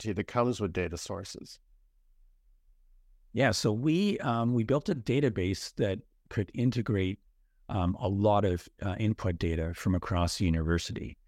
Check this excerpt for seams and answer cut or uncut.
uncut